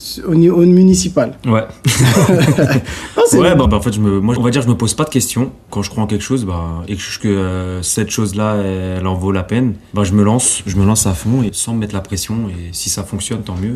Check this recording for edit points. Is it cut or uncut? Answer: cut